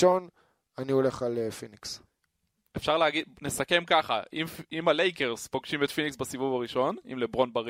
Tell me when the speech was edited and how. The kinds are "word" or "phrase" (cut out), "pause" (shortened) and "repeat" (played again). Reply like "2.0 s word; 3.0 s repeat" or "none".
none

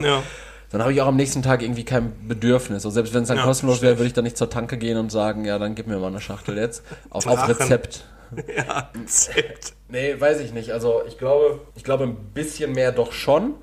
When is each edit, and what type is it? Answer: 7.3 s word; 8.9 s word; 11.7 s pause

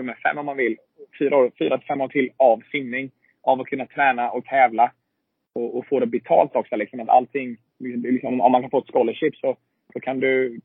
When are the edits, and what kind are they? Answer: none

